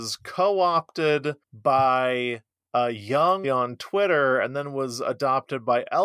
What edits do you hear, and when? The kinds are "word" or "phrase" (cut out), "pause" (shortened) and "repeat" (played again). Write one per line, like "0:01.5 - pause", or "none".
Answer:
0:01.4 - pause
0:03.4 - phrase